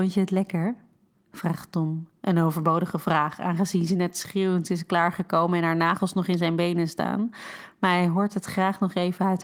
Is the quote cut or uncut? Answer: cut